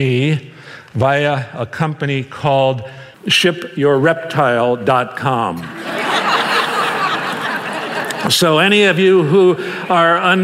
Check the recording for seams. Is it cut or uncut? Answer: cut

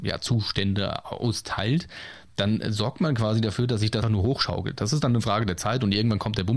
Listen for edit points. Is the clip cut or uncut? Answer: cut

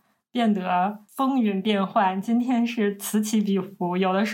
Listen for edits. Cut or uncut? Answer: cut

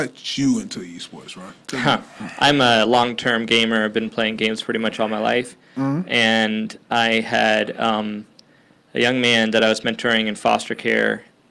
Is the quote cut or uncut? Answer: uncut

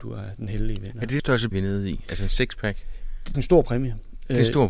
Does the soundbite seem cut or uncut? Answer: cut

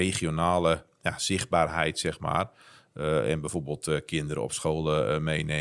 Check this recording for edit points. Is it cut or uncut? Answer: uncut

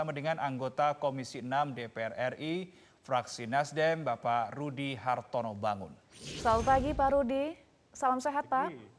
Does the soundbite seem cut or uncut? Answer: cut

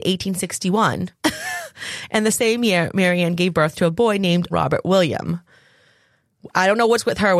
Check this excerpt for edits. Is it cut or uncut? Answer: cut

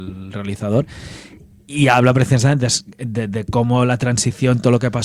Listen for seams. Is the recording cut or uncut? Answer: uncut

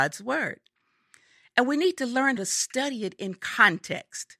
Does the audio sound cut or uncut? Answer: cut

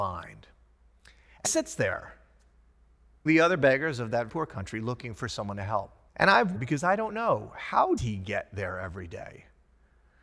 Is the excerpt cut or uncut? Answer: cut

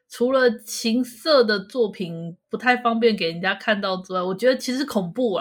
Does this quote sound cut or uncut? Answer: cut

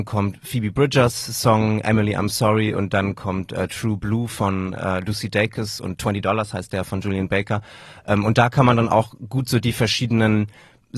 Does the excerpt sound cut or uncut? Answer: uncut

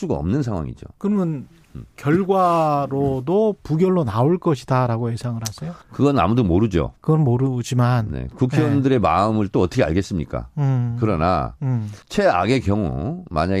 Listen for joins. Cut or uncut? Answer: cut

